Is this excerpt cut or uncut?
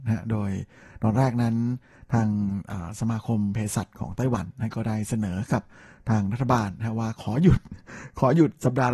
uncut